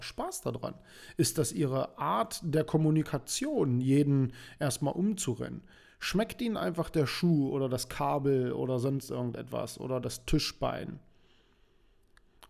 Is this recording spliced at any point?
no; 0 cuts

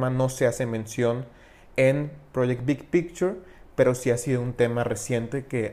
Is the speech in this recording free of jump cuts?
yes; 0 cuts

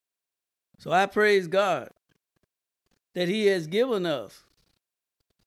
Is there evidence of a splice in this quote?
no; 0 cuts

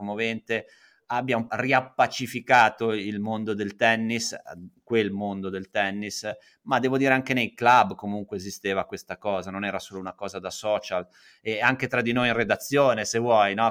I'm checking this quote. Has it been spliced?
yes; 1 cut; at 1.5 s

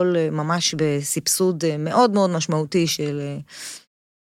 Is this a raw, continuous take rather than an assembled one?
yes; 0 cuts

